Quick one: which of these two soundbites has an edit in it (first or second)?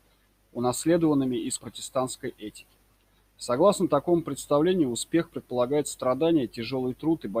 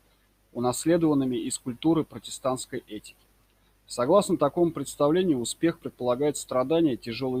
first